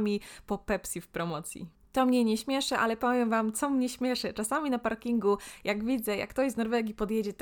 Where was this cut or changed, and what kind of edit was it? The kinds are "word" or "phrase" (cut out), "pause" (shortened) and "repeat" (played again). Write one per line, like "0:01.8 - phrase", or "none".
none